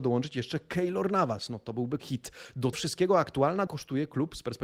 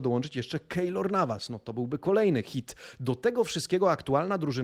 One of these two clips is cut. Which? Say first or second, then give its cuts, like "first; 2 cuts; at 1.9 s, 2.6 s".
first; 3 cuts; at 2.0 s, 2.7 s, 3.7 s